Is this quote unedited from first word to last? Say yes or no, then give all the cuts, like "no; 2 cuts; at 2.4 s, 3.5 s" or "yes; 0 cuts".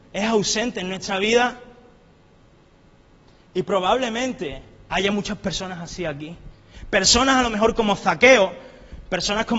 yes; 0 cuts